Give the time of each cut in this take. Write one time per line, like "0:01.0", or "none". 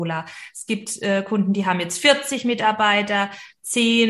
none